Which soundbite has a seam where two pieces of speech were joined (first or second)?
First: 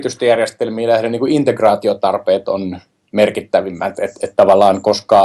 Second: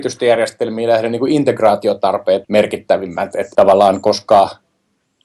second